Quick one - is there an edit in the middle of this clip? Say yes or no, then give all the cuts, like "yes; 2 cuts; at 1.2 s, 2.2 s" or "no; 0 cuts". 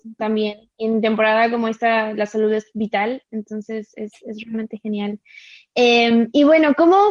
no; 0 cuts